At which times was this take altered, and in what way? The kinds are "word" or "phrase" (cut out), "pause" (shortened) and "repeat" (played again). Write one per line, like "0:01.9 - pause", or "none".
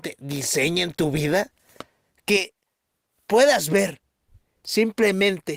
none